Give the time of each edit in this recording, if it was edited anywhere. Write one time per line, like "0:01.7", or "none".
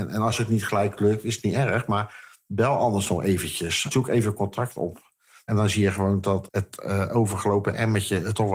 none